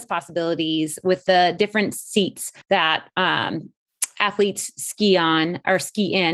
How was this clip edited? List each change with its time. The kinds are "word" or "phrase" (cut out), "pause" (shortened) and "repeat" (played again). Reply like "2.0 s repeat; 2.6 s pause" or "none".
2.6 s pause